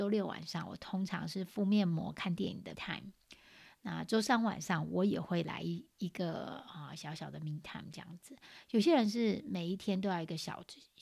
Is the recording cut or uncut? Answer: cut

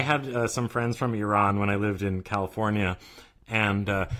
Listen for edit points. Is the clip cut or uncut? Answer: uncut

